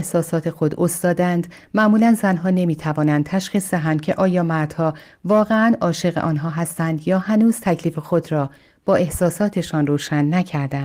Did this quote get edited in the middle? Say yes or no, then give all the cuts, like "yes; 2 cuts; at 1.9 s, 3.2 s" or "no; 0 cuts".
no; 0 cuts